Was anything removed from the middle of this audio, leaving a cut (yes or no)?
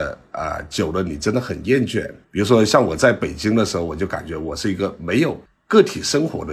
yes